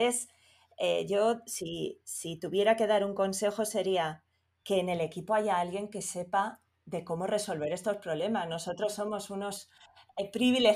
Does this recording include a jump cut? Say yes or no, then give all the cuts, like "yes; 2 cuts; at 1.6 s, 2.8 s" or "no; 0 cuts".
no; 0 cuts